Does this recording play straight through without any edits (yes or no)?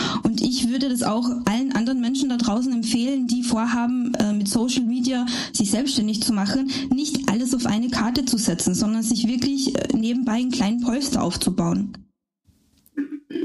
yes